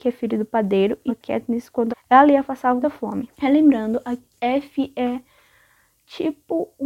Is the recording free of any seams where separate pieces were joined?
no; 6 cuts; at 1.1 s, 1.9 s, 2.4 s, 2.8 s, 3.3 s, 4.3 s

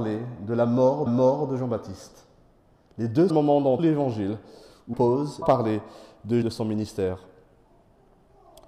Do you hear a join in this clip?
yes; 6 cuts; at 1.1 s, 3.3 s, 3.8 s, 4.9 s, 5.4 s, 6.4 s

